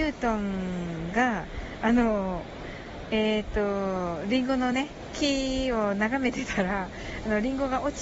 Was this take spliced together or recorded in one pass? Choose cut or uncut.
uncut